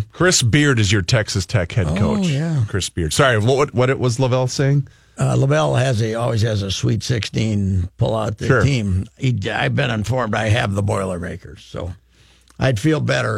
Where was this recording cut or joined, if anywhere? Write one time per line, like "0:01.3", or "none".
none